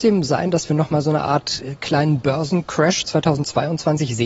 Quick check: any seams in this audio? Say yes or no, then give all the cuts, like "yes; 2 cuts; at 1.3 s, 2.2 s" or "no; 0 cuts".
no; 0 cuts